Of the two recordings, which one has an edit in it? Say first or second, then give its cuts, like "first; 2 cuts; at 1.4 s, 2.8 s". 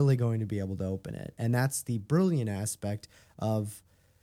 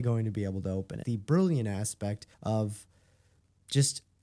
second; 2 cuts; at 1.0 s, 2.3 s